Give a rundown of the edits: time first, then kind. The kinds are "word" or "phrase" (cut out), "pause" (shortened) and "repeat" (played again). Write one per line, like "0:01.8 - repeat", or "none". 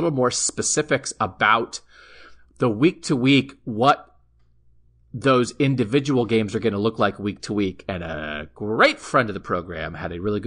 none